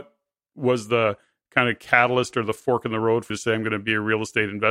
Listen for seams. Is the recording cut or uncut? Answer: cut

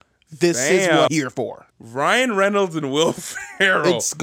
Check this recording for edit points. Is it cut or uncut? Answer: cut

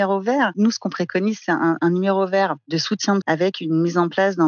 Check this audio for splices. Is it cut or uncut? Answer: cut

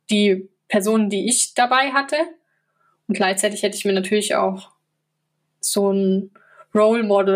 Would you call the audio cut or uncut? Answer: uncut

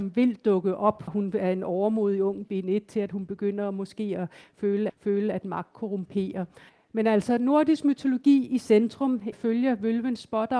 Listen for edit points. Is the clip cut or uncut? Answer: cut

